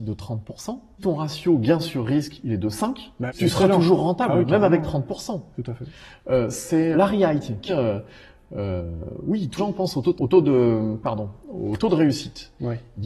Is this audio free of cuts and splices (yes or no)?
no